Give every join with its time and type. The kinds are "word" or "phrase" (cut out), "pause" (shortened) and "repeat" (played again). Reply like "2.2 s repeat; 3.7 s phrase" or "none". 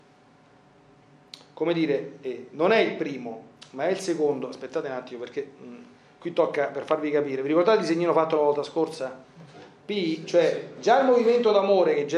none